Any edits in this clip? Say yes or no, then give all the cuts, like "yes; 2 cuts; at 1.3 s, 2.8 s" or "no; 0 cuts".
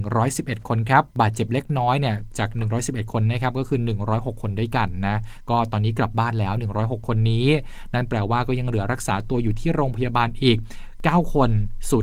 yes; 1 cut; at 1.1 s